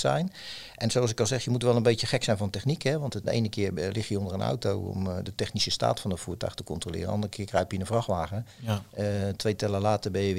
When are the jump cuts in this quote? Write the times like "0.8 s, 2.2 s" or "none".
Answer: 3.2 s

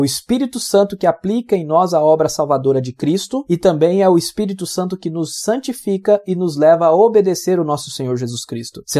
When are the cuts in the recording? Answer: none

